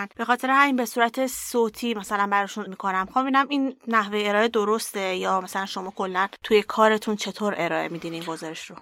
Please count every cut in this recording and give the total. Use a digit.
1